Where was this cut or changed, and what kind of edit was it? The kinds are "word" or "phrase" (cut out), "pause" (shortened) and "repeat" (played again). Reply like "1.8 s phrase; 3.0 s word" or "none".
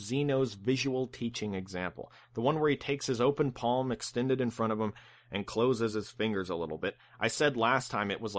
none